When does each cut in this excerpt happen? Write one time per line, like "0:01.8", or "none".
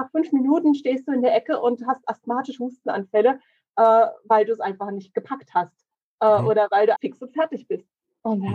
0:07.0